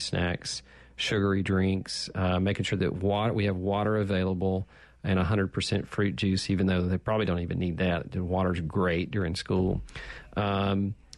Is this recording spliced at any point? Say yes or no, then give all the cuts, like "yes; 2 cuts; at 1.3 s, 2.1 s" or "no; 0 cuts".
no; 0 cuts